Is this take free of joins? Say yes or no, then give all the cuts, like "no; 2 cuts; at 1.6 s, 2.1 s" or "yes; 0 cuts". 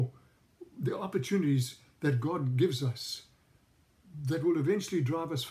yes; 0 cuts